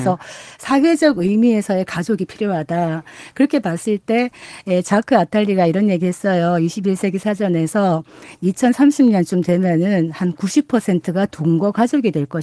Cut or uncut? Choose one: uncut